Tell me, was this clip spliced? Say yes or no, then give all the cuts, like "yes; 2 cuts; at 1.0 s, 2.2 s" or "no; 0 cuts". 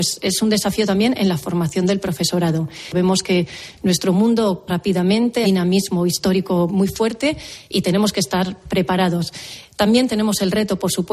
yes; 3 cuts; at 4.7 s, 5.4 s, 6.7 s